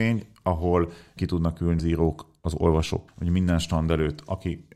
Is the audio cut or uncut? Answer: cut